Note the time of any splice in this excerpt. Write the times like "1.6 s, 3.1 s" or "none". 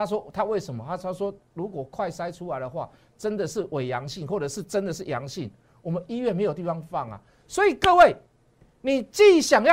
none